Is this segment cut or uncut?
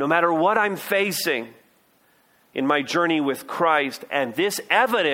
uncut